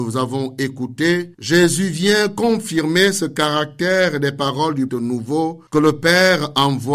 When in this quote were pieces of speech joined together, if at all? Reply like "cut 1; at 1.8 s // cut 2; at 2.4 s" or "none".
cut 1; at 1.3 s // cut 2; at 4.9 s // cut 3; at 5.7 s